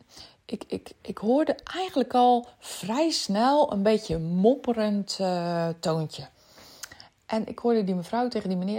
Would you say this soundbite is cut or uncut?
uncut